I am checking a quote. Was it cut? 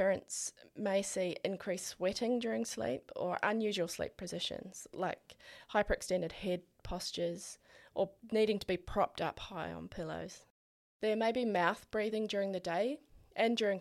no; 0 cuts

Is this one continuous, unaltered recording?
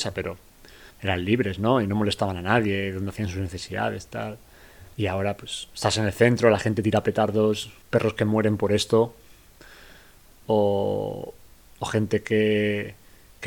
no; 3 cuts; at 0.9 s, 4.9 s, 7.8 s

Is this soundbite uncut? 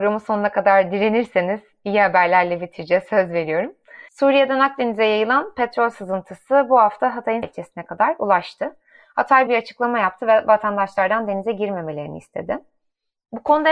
no; 3 cuts; at 4.1 s, 7.4 s, 9.5 s

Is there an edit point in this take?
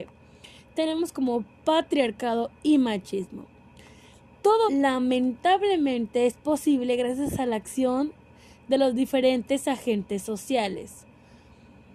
yes; 1 cut; at 4.7 s

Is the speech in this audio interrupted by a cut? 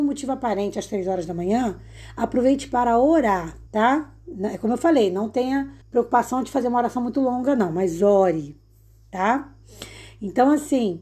yes; 2 cuts; at 3.7 s, 5.8 s

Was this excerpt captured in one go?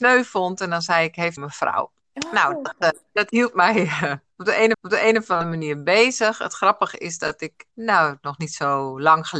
no; 5 cuts; at 1.4 s, 2.0 s, 3.1 s, 4.7 s, 7.7 s

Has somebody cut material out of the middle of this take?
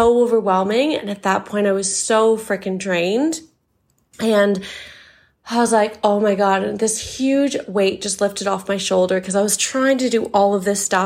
no; 0 cuts

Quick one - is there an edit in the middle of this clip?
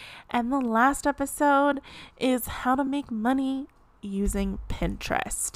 no; 0 cuts

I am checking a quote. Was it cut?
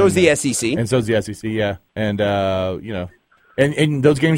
yes; 1 cut; at 1.9 s

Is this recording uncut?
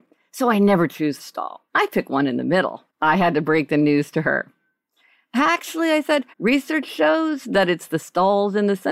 no; 4 cuts; at 1.2 s, 1.7 s, 2.9 s, 6.3 s

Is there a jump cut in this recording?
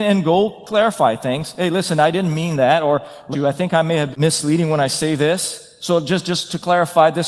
yes; 2 cuts; at 3.3 s, 4.1 s

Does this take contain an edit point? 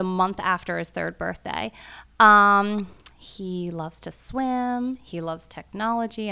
no; 0 cuts

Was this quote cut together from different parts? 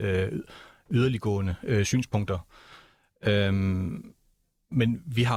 no; 0 cuts

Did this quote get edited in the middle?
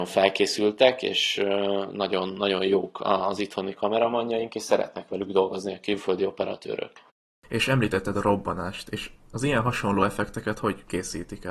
no; 0 cuts

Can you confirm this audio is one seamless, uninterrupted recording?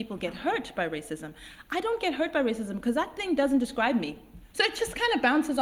no; 1 cut; at 4.5 s

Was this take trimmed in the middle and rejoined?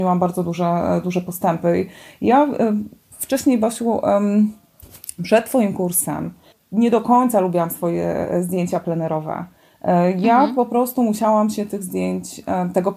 no; 0 cuts

